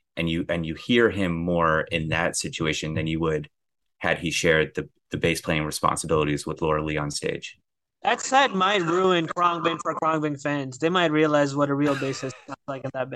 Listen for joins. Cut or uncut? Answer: uncut